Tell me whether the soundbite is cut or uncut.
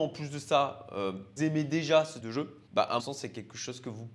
cut